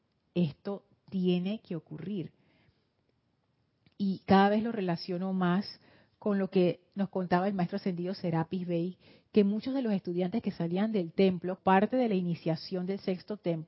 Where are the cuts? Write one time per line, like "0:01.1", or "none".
0:11.6